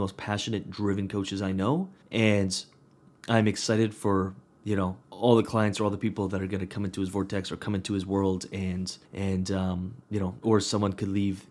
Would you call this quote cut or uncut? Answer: cut